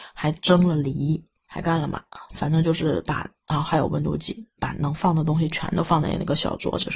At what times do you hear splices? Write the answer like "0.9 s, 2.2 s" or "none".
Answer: none